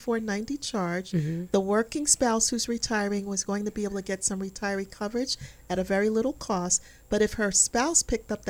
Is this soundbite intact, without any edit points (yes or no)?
yes